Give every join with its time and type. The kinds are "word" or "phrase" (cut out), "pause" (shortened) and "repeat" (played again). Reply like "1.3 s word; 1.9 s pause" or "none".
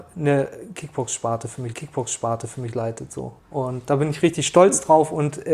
1.7 s repeat; 3.4 s pause; 4.2 s word